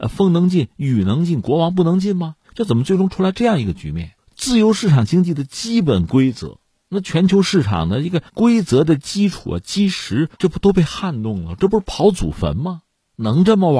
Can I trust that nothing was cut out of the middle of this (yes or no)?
no